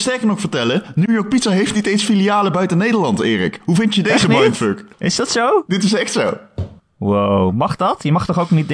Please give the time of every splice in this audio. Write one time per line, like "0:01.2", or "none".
0:04.9
0:06.8